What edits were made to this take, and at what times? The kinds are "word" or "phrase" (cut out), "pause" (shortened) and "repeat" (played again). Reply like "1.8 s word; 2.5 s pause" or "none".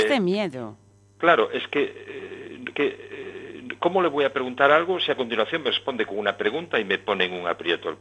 2.7 s repeat